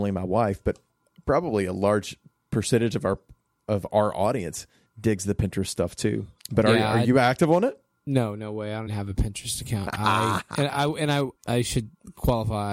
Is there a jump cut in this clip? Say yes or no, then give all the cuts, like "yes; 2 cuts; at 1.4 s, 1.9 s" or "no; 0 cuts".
yes; 3 cuts; at 6.4 s, 8.9 s, 11.4 s